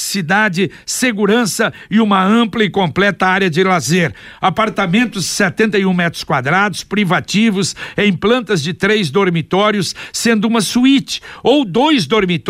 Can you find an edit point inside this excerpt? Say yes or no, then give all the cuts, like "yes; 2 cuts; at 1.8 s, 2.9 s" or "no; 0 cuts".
no; 0 cuts